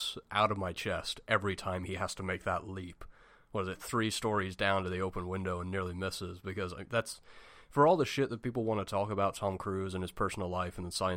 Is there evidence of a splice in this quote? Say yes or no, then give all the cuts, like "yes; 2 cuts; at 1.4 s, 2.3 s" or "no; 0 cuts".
no; 0 cuts